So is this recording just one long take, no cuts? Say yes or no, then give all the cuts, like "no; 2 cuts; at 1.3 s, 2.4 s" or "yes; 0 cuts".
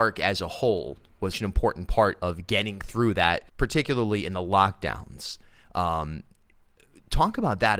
no; 2 cuts; at 1.3 s, 3.5 s